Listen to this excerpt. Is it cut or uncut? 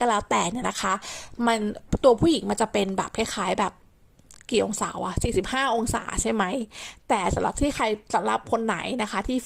uncut